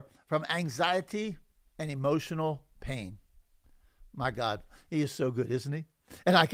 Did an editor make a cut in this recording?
no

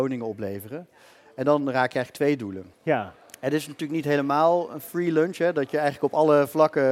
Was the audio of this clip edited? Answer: yes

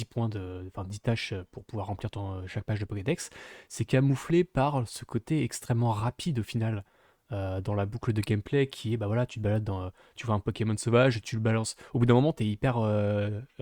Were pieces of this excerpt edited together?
no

